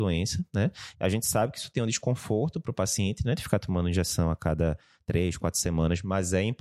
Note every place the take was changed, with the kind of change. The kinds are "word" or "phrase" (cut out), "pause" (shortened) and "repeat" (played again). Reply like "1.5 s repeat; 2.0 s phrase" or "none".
none